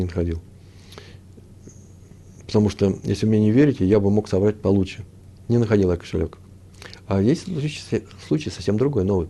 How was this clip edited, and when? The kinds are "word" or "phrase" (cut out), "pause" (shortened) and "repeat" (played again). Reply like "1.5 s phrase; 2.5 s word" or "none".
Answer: none

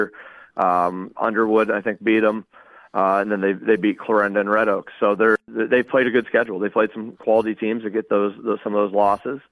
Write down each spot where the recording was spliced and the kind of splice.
none

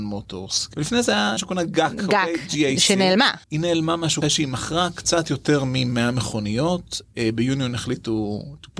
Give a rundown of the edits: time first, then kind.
1.4 s word; 3.4 s pause; 4.2 s phrase

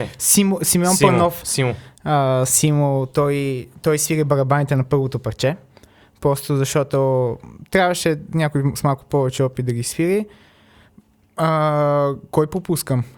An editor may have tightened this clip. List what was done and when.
none

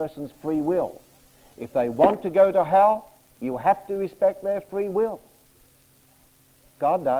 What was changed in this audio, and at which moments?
none

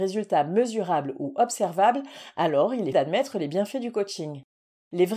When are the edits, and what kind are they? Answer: 2.9 s word

